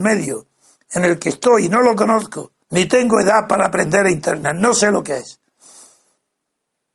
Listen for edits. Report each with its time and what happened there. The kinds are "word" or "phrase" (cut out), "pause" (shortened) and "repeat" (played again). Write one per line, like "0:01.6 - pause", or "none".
0:02.6 - pause